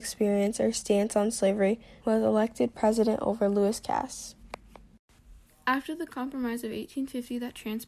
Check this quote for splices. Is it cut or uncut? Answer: cut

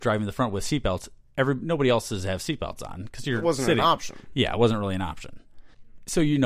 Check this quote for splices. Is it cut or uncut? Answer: uncut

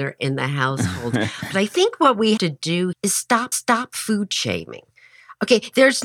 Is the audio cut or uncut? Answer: cut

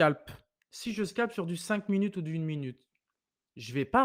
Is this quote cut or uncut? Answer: uncut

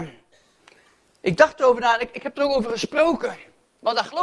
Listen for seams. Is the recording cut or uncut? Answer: uncut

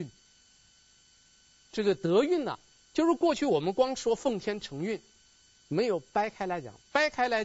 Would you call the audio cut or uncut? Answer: uncut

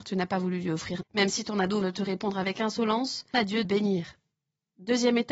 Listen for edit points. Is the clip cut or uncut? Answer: cut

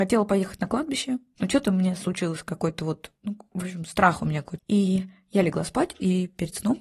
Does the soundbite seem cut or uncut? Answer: cut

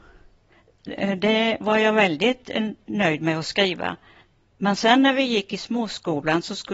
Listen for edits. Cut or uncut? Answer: uncut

